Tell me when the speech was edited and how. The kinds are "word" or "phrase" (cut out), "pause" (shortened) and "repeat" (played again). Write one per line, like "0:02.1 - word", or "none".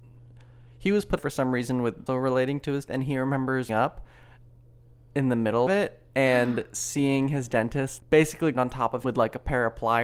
0:01.2 - word
0:02.1 - word
0:02.9 - word
0:03.7 - word
0:05.7 - word
0:08.0 - word
0:08.5 - word
0:09.0 - word